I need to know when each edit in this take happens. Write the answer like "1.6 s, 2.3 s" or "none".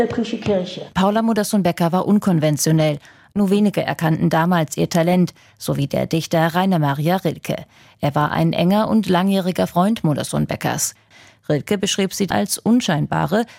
none